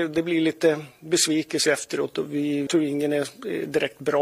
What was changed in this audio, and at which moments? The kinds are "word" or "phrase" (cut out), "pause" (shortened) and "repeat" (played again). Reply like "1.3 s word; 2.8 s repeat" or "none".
1.7 s word; 2.7 s word